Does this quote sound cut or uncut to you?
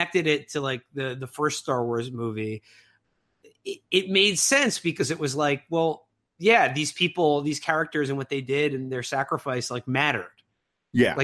uncut